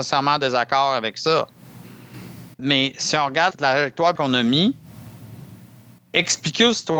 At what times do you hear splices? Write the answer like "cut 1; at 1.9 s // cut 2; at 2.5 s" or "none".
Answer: cut 1; at 2.5 s // cut 2; at 3.5 s // cut 3; at 4.2 s